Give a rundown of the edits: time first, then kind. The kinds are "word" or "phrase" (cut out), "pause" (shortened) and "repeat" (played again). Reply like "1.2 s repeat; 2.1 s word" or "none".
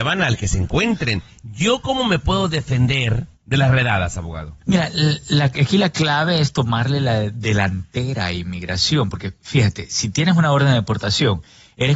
3.4 s pause